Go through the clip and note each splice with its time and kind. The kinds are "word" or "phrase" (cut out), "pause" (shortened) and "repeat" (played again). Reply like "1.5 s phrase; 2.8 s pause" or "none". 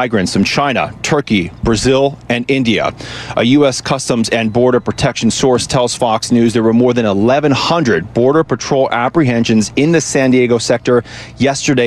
none